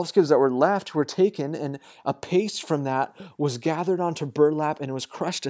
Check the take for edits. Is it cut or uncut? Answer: uncut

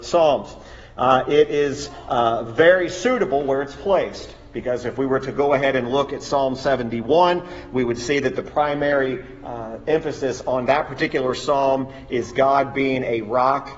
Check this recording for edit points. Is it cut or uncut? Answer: uncut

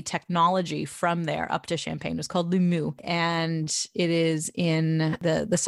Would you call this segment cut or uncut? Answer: uncut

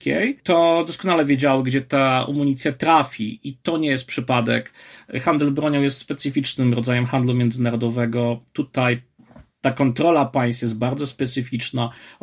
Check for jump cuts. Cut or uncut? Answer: uncut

